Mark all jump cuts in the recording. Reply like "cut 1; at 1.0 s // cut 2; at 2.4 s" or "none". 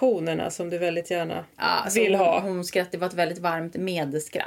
cut 1; at 1.5 s